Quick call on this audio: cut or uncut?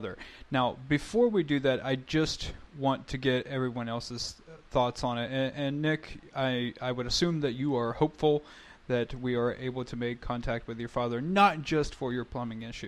uncut